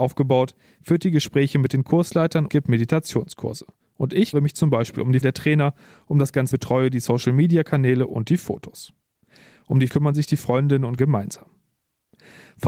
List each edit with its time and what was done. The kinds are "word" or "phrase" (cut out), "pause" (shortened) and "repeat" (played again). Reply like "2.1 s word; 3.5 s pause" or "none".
2.5 s word; 4.3 s word; 5.2 s word; 6.5 s word; 9.9 s word; 11.0 s word